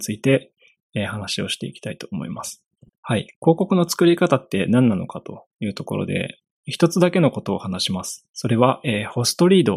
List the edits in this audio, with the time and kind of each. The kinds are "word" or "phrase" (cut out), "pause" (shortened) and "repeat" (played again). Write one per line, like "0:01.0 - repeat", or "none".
0:02.9 - pause
0:08.3 - pause